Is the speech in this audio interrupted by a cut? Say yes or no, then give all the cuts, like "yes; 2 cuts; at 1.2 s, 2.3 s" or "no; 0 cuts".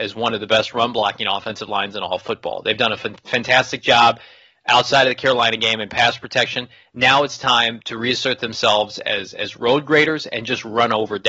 no; 0 cuts